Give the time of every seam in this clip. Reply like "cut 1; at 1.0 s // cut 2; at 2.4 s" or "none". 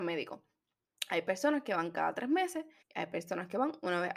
cut 1; at 2.8 s

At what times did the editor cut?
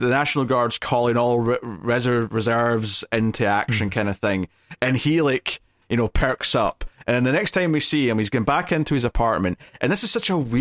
none

